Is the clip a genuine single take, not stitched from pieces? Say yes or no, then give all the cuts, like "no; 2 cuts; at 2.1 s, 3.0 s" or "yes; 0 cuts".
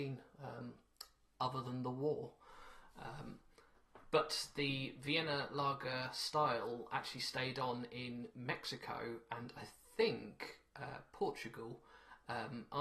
yes; 0 cuts